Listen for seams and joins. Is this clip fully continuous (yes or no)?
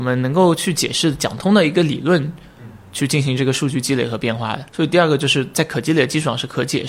no